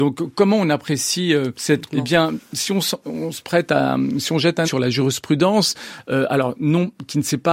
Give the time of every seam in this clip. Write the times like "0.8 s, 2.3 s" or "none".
1.5 s, 1.9 s, 4.6 s